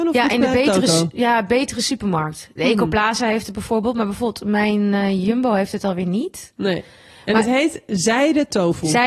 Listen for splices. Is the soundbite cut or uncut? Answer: uncut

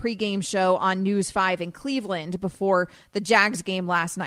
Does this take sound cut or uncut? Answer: uncut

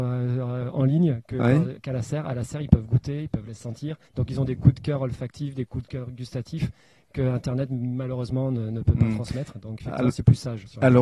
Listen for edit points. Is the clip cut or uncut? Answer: cut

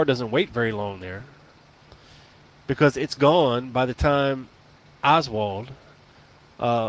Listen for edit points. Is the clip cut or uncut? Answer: uncut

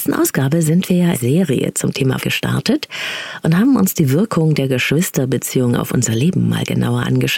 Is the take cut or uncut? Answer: cut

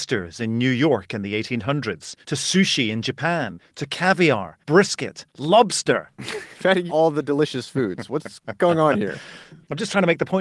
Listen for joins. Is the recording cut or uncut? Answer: cut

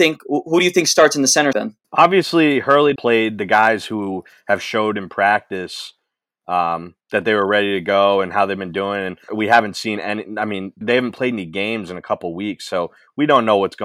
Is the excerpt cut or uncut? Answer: cut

